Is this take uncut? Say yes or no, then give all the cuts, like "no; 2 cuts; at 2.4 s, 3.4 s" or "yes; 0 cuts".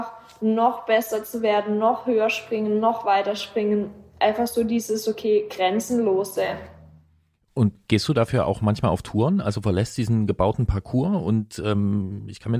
yes; 0 cuts